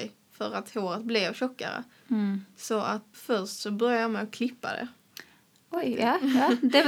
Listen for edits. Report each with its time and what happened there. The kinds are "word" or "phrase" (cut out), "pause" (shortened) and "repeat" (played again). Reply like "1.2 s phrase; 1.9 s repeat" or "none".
3.1 s word